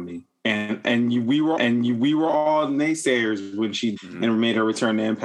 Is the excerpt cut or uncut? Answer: cut